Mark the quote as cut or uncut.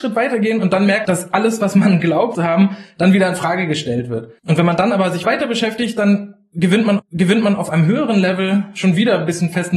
cut